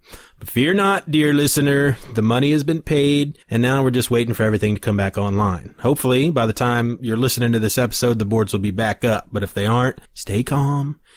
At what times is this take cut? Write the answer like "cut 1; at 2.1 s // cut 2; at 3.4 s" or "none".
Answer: cut 1; at 3.4 s // cut 2; at 10.1 s